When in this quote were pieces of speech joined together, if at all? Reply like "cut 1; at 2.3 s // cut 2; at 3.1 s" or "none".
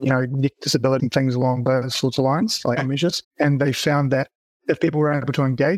cut 1; at 1.0 s // cut 2; at 2.8 s // cut 3; at 3.2 s